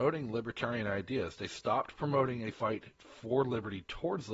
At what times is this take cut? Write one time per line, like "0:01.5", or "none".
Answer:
none